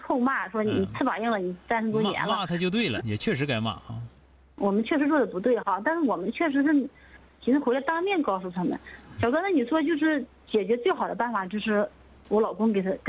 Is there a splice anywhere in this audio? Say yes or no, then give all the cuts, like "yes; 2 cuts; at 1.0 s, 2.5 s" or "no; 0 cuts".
yes; 1 cut; at 3.0 s